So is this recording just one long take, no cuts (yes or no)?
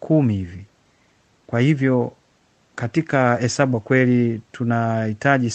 no